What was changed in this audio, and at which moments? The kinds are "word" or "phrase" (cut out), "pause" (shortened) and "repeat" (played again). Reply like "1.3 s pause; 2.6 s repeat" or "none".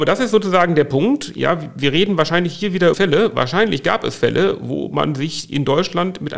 2.9 s phrase